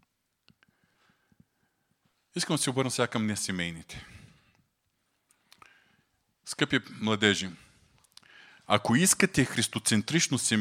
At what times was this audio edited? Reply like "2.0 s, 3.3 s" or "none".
none